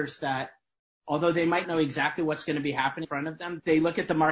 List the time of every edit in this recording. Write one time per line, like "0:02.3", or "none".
0:01.6
0:03.0